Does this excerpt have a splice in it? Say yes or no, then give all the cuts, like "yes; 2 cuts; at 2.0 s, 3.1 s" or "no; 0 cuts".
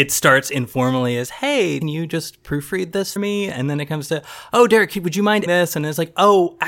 yes; 3 cuts; at 1.8 s, 3.2 s, 5.5 s